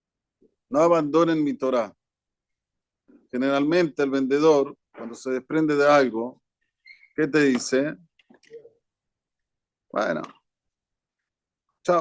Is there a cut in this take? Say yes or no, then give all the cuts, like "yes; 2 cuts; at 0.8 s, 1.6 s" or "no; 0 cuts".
no; 0 cuts